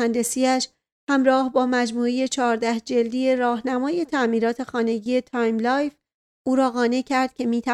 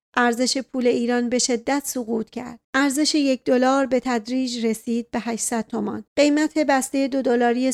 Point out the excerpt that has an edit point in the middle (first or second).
second